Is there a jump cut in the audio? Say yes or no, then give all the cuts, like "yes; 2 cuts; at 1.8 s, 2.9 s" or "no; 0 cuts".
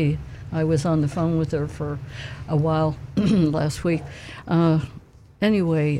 no; 0 cuts